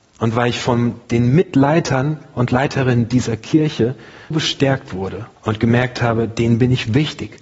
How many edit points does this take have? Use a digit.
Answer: 3